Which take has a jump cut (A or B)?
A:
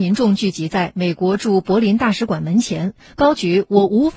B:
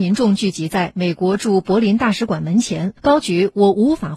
B